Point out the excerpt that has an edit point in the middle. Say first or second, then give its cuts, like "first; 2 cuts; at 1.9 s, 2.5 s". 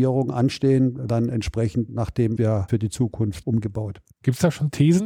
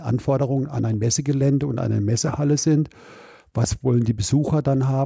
first; 3 cuts; at 1.1 s, 2.4 s, 2.7 s